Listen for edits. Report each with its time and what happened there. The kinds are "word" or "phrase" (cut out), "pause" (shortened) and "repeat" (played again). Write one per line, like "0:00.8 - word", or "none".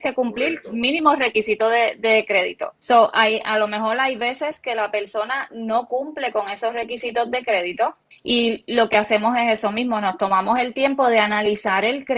0:02.8 - pause
0:08.1 - pause